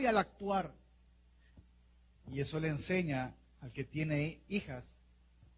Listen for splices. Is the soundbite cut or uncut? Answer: uncut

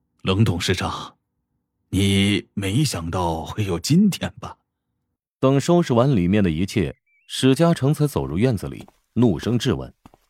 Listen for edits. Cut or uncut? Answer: uncut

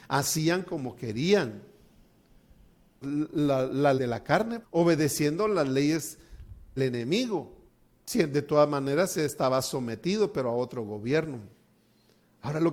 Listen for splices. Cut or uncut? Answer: cut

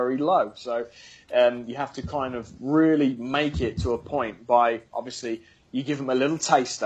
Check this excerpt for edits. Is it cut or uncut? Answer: uncut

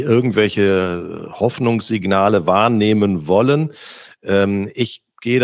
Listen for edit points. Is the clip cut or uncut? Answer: uncut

